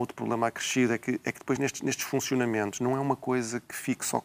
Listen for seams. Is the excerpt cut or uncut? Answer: uncut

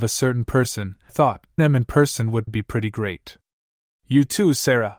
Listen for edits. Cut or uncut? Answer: cut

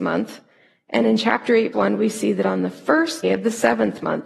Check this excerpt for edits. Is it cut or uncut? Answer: cut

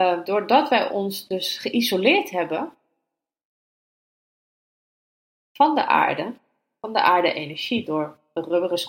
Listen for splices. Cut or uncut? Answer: uncut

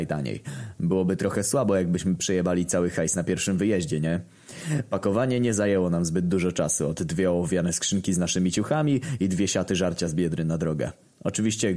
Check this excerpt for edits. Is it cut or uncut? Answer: uncut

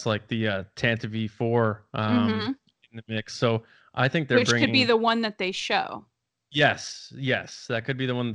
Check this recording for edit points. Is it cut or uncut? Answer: uncut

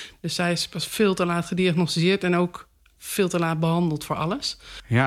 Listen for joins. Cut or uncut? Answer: uncut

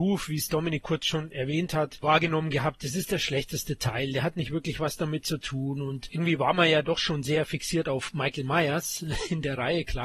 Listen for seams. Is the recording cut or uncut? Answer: uncut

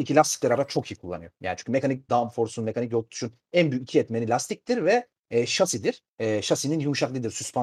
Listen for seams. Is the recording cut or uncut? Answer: cut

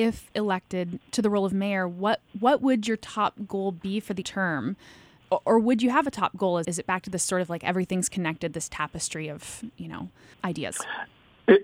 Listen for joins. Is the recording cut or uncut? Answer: cut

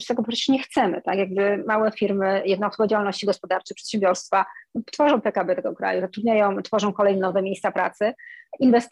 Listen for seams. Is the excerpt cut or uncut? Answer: uncut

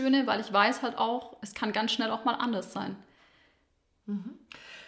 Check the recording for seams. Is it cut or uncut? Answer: uncut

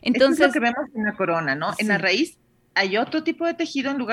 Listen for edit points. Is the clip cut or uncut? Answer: uncut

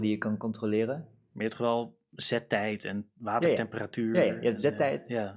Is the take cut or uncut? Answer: uncut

